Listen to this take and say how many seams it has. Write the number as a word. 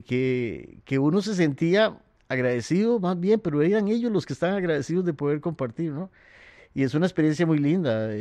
one